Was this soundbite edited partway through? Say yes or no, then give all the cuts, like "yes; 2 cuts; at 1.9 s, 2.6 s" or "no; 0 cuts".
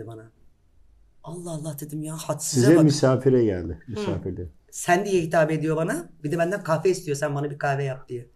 yes; 1 cut; at 4.6 s